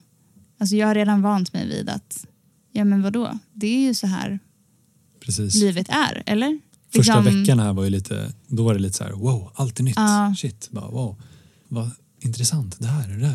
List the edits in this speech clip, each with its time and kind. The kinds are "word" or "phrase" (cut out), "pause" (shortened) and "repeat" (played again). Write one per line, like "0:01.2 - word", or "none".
0:11.6 - word

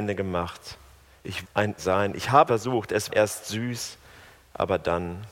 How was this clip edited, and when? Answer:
0:01.4 - word
0:01.8 - word
0:02.5 - word
0:03.1 - word

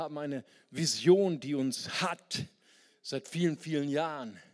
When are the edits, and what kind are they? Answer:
none

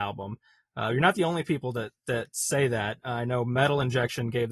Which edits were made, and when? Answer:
none

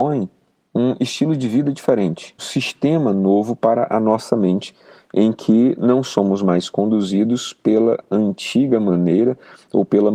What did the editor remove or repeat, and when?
0:02.4 - word

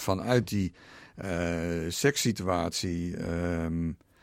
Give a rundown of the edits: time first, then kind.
none

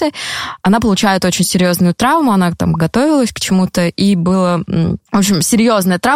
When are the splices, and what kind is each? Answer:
none

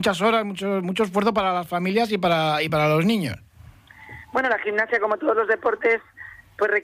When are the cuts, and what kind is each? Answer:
none

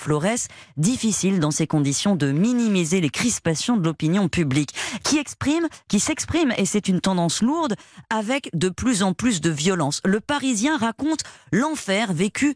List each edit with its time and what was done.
none

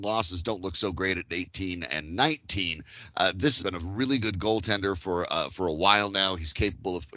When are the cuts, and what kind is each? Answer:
0:03.6 - phrase

